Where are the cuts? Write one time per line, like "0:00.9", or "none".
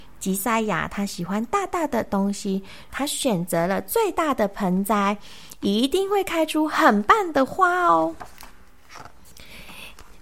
0:02.9